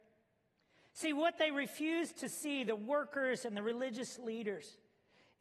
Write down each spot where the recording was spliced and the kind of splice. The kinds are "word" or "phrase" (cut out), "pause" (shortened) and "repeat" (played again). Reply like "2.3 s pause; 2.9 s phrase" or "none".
none

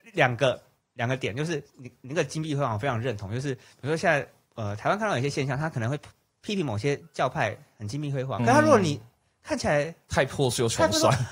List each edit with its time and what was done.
8.4 s word

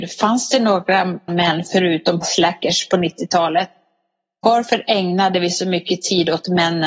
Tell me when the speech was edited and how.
1.3 s word; 2.2 s word

